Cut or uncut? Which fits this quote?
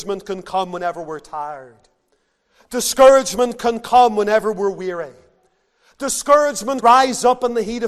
cut